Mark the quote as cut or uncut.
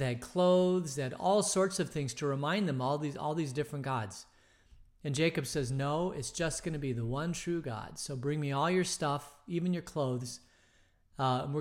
uncut